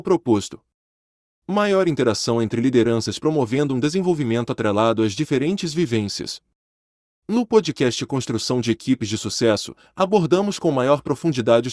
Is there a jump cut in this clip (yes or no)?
no